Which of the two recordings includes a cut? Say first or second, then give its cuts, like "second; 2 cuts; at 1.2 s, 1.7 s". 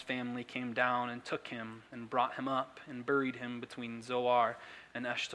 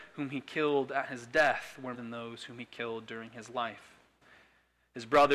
second; 1 cut; at 1.9 s